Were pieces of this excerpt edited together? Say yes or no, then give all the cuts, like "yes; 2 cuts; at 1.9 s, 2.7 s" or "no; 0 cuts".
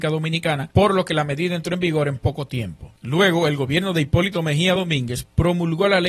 no; 0 cuts